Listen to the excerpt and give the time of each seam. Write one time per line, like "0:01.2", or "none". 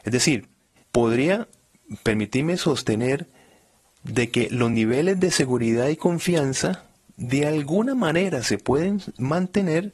none